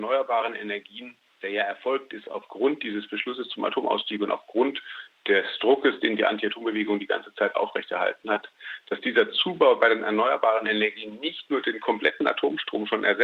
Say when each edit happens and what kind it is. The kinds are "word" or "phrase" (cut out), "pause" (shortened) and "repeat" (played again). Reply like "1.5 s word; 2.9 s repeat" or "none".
none